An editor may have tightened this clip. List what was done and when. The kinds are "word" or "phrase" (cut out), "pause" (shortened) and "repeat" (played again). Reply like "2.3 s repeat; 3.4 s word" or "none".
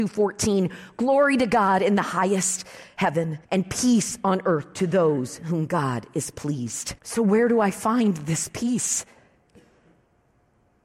3.4 s pause; 7.0 s pause